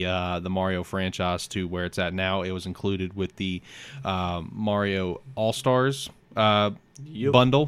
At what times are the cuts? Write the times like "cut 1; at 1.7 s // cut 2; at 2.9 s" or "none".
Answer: none

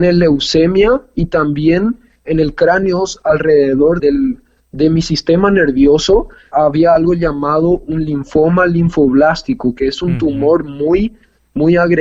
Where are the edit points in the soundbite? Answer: cut 1; at 4.0 s

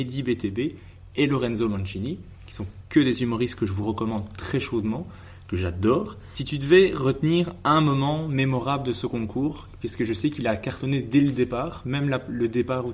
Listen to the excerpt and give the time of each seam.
none

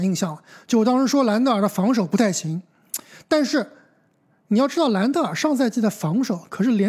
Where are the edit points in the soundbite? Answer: none

